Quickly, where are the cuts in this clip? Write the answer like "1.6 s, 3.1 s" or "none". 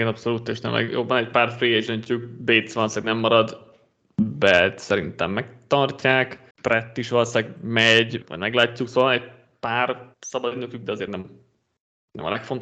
6.5 s, 8.2 s, 10.1 s, 11.1 s